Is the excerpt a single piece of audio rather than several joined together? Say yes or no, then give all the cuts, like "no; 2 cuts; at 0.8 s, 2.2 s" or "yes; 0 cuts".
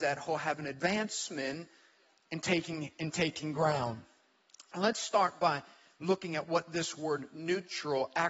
yes; 0 cuts